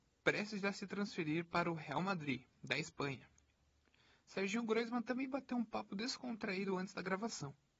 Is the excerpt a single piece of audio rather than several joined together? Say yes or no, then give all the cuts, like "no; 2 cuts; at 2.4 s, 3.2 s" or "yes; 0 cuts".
yes; 0 cuts